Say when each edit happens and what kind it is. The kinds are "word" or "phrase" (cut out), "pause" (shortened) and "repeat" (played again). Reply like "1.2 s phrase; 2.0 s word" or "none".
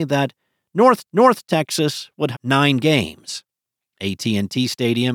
1.1 s repeat; 2.3 s word